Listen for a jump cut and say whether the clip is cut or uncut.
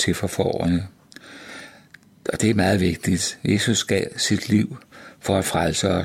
uncut